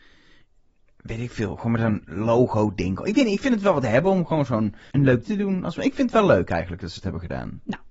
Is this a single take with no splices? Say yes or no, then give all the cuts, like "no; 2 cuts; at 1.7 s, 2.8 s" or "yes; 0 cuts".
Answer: no; 2 cuts; at 4.9 s, 5.2 s